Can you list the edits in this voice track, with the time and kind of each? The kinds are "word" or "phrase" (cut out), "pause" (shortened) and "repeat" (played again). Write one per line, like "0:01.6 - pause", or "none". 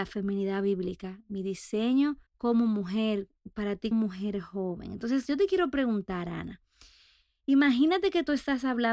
0:02.3 - pause
0:03.9 - word